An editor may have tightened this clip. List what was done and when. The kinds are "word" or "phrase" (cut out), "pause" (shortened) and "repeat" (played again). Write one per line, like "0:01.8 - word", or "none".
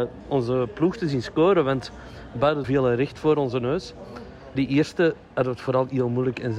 0:02.6 - word
0:04.6 - word